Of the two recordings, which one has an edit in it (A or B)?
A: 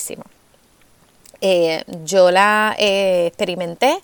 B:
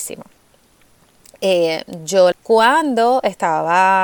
B